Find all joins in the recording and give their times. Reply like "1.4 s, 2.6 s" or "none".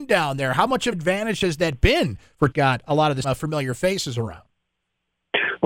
0.9 s, 2.5 s, 3.2 s